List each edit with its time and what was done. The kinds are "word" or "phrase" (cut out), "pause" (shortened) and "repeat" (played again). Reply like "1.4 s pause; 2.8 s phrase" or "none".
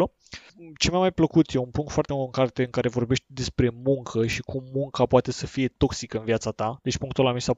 2.1 s word